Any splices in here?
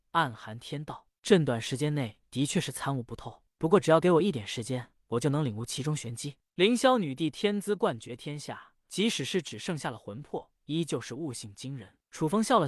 no; 0 cuts

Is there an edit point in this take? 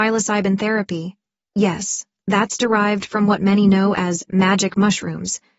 no; 0 cuts

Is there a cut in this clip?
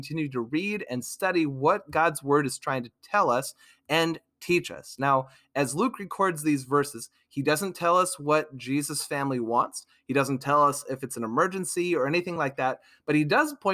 no; 0 cuts

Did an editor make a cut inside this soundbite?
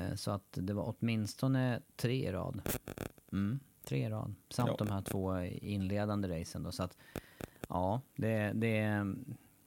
yes; 3 cuts; at 3.2 s, 4.4 s, 8.1 s

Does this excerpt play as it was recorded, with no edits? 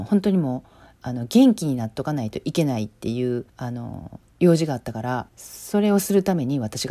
no; 3 cuts; at 3.5 s, 4.3 s, 5.3 s

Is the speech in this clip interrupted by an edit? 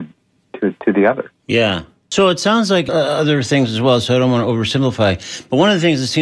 no; 0 cuts

